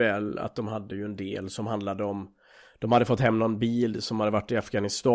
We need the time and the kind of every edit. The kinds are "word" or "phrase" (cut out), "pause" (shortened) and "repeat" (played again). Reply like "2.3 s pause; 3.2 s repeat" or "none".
none